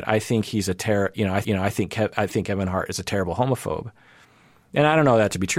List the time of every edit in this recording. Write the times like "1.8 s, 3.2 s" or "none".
1.4 s